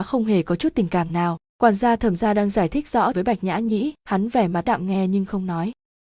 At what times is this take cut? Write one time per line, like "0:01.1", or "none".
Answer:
0:01.5
0:03.1
0:04.0
0:04.7